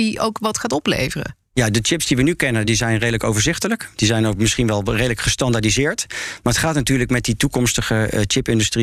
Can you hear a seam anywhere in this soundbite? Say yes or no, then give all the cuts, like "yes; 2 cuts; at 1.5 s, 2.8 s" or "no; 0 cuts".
yes; 1 cut; at 2.6 s